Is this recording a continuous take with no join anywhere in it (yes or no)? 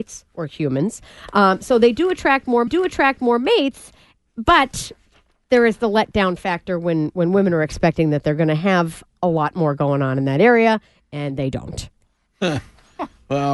no